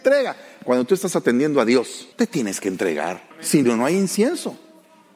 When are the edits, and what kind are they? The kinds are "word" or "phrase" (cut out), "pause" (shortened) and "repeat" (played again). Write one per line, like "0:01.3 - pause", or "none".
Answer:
0:02.1 - pause
0:03.3 - pause